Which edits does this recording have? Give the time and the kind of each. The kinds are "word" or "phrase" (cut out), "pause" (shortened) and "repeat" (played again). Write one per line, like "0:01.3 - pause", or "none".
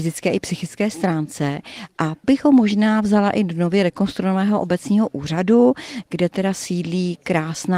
0:02.2 - word